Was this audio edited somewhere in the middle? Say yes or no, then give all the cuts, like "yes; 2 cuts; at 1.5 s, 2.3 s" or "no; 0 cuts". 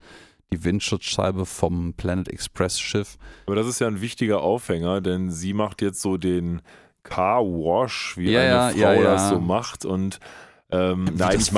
no; 0 cuts